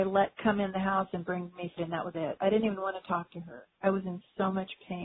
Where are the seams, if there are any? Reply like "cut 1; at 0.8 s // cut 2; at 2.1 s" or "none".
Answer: cut 1; at 1.8 s // cut 2; at 2.1 s // cut 3; at 3.7 s